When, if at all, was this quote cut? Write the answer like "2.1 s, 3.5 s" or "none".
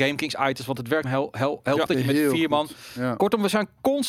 1.0 s, 1.9 s